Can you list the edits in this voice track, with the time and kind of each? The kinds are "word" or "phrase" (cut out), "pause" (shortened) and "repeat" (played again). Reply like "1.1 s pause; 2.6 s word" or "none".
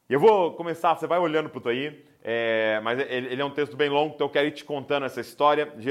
1.0 s word; 1.6 s word